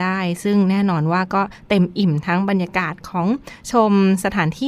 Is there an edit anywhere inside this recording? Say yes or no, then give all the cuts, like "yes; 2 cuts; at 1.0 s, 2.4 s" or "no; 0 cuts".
no; 0 cuts